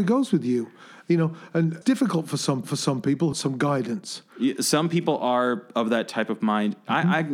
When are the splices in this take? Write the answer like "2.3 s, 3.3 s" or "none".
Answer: 1.8 s, 2.6 s, 3.3 s